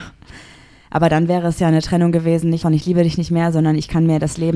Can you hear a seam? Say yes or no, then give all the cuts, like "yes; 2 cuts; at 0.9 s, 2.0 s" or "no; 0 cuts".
yes; 1 cut; at 2.6 s